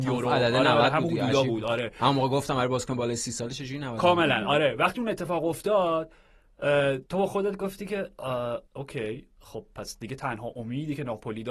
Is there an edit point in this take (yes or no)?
yes